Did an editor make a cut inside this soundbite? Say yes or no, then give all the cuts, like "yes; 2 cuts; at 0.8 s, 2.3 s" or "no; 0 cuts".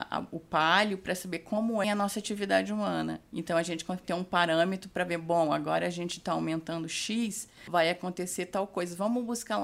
yes; 2 cuts; at 1.8 s, 4.0 s